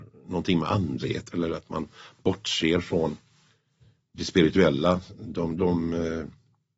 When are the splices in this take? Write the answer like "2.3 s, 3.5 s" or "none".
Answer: 1.3 s